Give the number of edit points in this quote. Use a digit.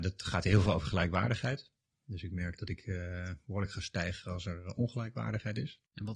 1